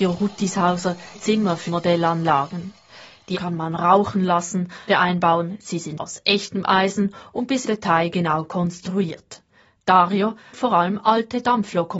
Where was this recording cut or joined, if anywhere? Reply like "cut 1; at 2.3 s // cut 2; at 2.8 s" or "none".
cut 1; at 1.1 s // cut 2; at 1.7 s // cut 3; at 3.3 s // cut 4; at 4.9 s // cut 5; at 6.0 s // cut 6; at 7.6 s // cut 7; at 10.5 s